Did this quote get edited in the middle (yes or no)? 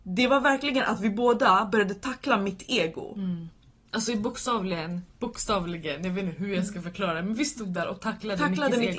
yes